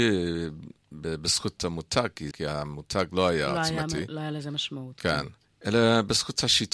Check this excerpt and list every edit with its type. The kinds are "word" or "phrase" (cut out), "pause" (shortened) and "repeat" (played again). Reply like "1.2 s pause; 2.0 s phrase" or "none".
1.6 s word; 2.3 s word; 5.4 s pause